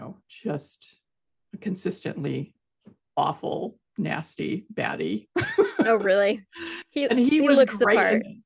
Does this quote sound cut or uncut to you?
uncut